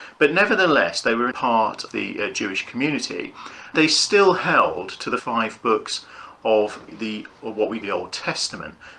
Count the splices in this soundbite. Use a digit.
6